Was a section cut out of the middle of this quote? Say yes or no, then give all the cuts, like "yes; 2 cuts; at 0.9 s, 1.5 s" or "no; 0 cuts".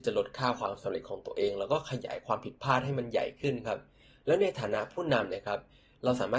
no; 0 cuts